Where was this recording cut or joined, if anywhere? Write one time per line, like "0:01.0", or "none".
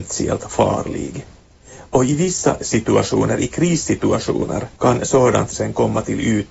0:04.8